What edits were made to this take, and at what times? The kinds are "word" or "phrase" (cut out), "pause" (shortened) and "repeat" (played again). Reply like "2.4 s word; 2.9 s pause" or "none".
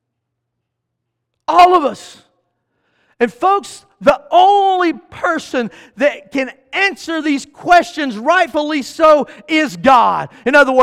none